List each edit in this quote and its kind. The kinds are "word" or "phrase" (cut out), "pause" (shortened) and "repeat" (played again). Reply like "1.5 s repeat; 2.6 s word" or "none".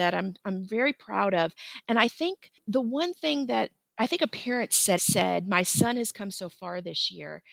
3.9 s pause; 5.0 s phrase